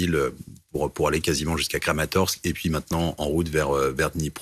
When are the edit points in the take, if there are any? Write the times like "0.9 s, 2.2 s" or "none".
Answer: none